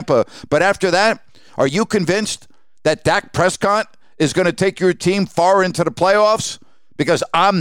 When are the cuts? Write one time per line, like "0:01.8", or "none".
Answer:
none